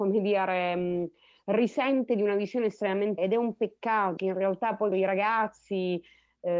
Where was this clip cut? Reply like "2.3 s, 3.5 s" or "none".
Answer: 3.2 s, 4.2 s, 4.9 s